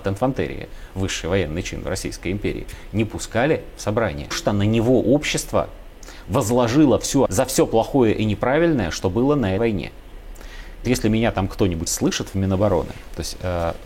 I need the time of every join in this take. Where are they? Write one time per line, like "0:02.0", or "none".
0:04.3
0:07.3
0:09.6
0:10.8
0:11.9